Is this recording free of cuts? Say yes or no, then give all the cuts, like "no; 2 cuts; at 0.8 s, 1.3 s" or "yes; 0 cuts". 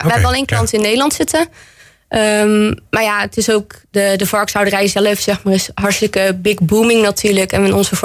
yes; 0 cuts